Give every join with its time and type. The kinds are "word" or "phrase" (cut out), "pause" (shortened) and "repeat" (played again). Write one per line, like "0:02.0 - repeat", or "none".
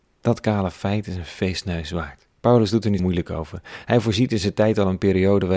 0:02.4 - pause
0:03.0 - word